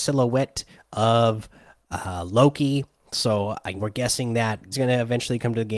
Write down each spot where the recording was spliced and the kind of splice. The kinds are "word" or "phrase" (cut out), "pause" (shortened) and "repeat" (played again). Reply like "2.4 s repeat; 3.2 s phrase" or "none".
3.8 s word; 4.7 s word